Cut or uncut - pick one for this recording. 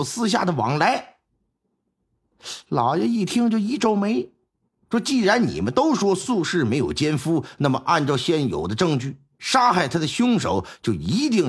uncut